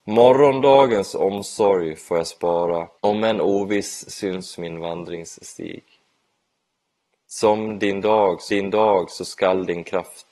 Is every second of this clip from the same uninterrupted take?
no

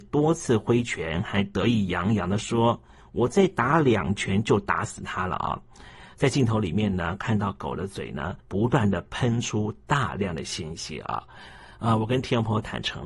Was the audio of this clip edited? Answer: yes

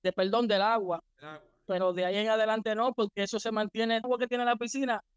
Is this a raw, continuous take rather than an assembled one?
no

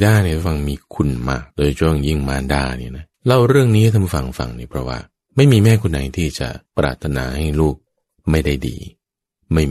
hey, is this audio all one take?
no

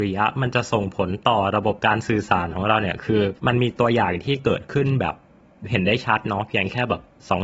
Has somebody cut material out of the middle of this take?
yes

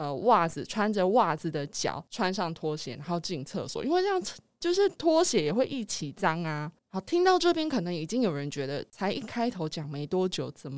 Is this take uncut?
no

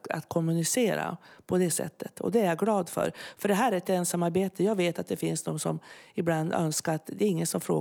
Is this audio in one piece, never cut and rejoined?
yes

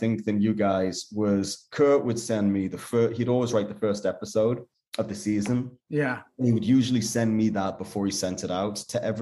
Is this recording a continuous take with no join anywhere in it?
yes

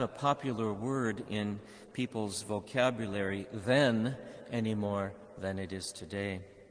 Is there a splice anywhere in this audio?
no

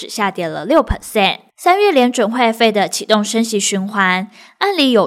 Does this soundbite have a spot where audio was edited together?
yes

